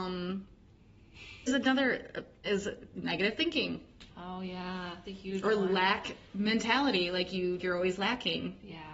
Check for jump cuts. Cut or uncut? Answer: cut